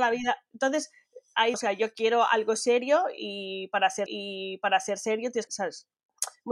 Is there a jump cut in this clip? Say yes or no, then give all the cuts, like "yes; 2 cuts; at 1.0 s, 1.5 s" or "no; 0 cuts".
yes; 3 cuts; at 1.5 s, 4.1 s, 5.5 s